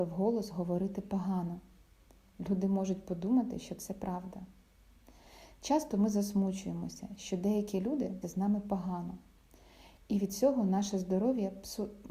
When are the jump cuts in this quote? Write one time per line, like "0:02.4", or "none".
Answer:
0:08.2